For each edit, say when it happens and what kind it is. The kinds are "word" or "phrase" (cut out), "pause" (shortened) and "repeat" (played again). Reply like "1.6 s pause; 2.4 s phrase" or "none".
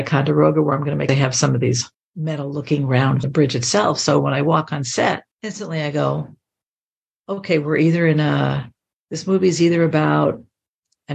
1.1 s phrase; 1.9 s pause; 3.2 s phrase; 5.3 s pause